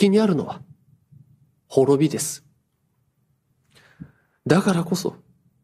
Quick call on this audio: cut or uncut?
uncut